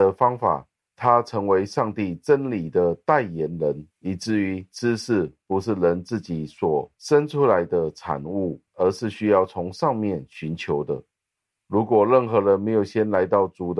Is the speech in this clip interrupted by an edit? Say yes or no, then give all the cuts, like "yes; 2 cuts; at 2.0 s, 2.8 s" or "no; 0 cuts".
yes; 2 cuts; at 3.9 s, 8.7 s